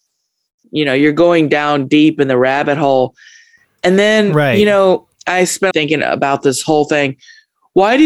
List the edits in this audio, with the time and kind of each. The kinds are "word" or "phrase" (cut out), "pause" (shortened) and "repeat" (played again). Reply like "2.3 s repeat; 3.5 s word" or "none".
5.1 s pause; 5.7 s phrase